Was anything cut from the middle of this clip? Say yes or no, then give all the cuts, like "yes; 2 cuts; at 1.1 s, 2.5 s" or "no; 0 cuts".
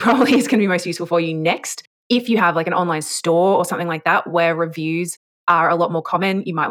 no; 0 cuts